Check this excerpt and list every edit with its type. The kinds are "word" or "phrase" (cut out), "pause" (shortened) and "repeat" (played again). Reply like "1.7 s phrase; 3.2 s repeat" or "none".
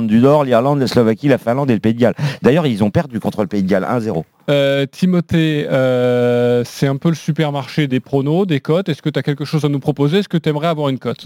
7.9 s word

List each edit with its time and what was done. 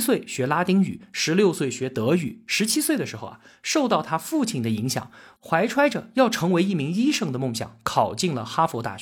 none

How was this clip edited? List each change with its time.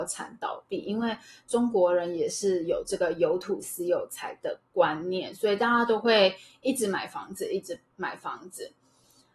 none

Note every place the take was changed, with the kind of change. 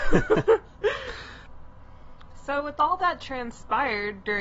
none

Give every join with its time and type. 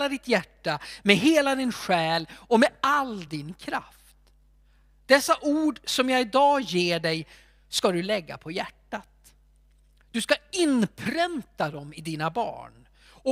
none

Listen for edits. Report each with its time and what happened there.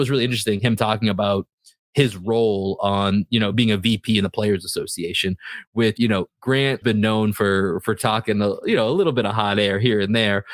3.5 s word; 6.0 s word; 6.8 s word

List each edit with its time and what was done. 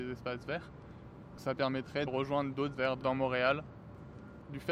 2.1 s word; 2.7 s word

